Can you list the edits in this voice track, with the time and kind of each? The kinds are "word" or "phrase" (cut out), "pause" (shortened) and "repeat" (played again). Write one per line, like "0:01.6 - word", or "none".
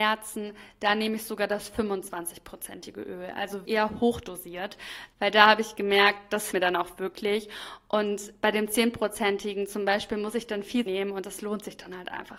0:03.6 - word
0:06.5 - word
0:10.9 - phrase